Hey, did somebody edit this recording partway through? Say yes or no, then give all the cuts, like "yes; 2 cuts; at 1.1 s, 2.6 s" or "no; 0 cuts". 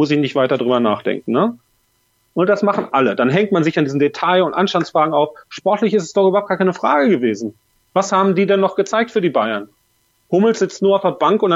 no; 0 cuts